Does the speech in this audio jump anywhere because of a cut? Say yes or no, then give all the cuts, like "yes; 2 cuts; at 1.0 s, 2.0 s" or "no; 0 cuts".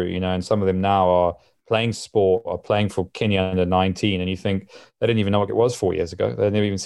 yes; 1 cut; at 5.5 s